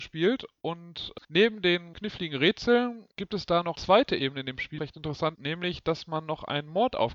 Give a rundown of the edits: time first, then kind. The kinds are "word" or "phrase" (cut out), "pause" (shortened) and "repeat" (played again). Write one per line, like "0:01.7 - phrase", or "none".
0:01.2 - pause
0:01.9 - phrase
0:03.1 - pause
0:03.7 - word
0:04.8 - word
0:05.3 - word